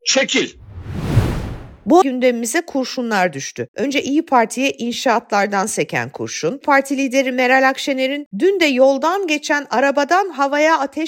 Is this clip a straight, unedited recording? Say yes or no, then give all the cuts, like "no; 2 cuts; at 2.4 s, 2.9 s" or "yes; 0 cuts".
no; 3 cuts; at 2.0 s, 6.6 s, 8.3 s